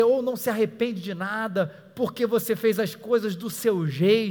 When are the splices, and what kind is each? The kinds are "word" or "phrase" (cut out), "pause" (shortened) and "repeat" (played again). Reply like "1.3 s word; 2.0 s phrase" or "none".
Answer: none